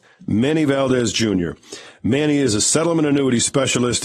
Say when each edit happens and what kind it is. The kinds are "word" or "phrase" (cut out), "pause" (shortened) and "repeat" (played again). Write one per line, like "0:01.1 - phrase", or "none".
none